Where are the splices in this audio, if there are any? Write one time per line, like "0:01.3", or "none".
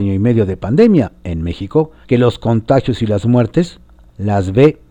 0:02.0